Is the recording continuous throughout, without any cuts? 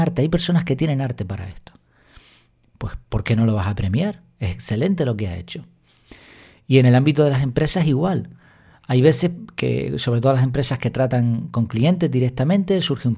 yes; 0 cuts

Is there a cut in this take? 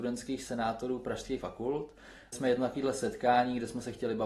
yes; 2 cuts; at 1.4 s, 2.3 s

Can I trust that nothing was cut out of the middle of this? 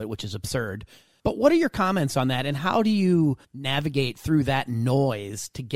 no; 1 cut; at 3.4 s

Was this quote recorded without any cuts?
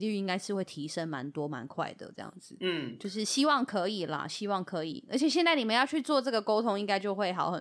yes; 0 cuts

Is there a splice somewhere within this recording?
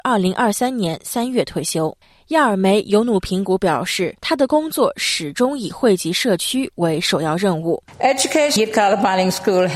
yes; 3 cuts; at 2.0 s, 4.2 s, 8.6 s

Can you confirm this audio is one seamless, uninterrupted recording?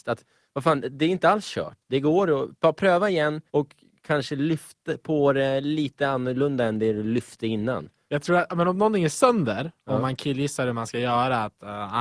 no; 2 cuts; at 1.8 s, 3.5 s

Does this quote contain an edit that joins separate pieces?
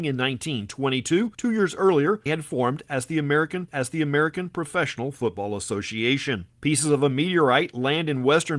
yes; 4 cuts; at 1.3 s, 2.3 s, 3.7 s, 6.6 s

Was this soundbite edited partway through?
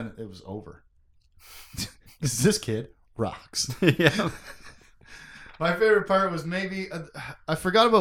no; 0 cuts

